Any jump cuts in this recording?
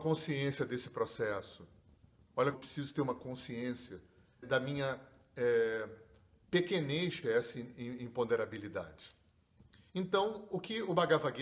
yes; 3 cuts; at 2.5 s, 4.4 s, 7.2 s

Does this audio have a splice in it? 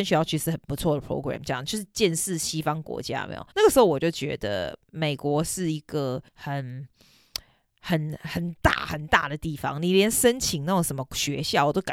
yes; 2 cuts; at 3.5 s, 6.3 s

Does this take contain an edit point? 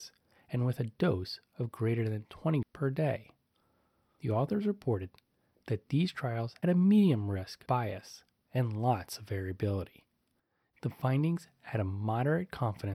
yes; 3 cuts; at 2.6 s, 6.6 s, 7.7 s

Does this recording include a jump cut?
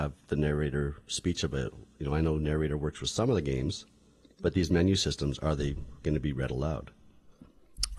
no; 0 cuts

